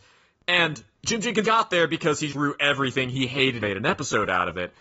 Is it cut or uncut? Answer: cut